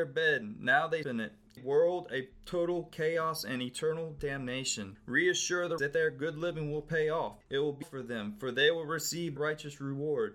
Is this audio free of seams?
no; 5 cuts; at 1.0 s, 1.6 s, 5.8 s, 7.8 s, 9.4 s

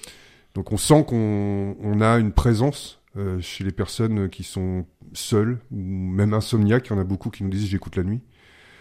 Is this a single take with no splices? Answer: yes; 0 cuts

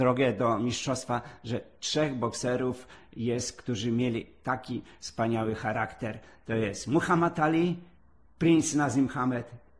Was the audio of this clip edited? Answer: no; 0 cuts

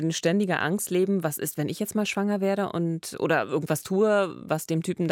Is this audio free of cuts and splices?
yes; 0 cuts

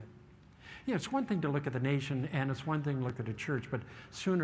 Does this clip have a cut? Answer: no; 0 cuts

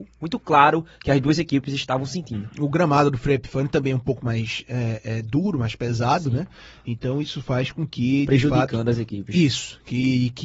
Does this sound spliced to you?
no; 0 cuts

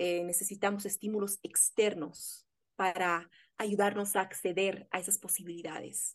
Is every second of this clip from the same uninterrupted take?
yes; 0 cuts

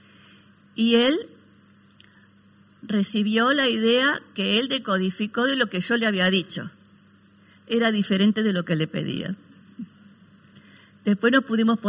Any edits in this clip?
no; 0 cuts

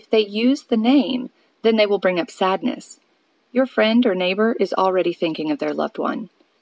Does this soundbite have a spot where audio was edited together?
no; 0 cuts

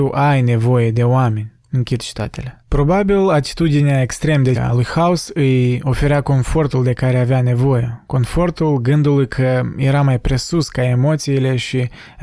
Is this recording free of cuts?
no; 3 cuts; at 1.6 s, 2.6 s, 4.5 s

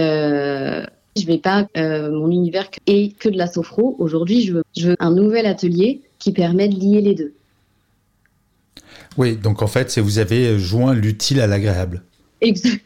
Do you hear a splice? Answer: yes; 6 cuts; at 1.2 s, 1.7 s, 2.8 s, 3.2 s, 4.6 s, 4.9 s

